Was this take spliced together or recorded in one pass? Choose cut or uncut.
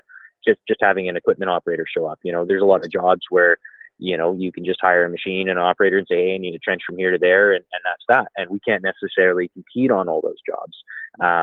cut